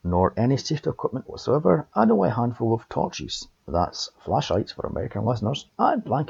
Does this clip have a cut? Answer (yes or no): no